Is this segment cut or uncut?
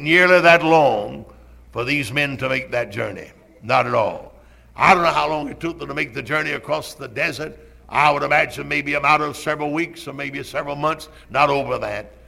uncut